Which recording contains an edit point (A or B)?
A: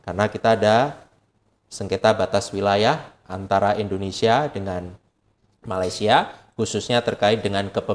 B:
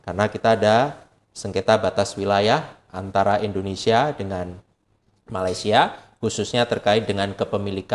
B